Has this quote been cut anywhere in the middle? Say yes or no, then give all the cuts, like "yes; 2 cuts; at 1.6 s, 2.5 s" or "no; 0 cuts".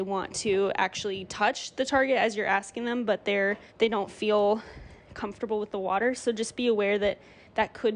yes; 1 cut; at 3.7 s